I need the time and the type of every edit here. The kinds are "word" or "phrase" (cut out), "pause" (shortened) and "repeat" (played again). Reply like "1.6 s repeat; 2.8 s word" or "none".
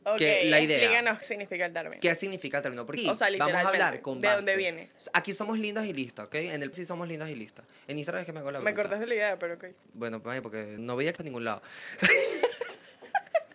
1.2 s word; 3.0 s word; 6.7 s word; 10.8 s word; 11.2 s word